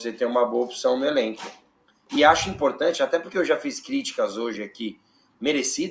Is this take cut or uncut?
uncut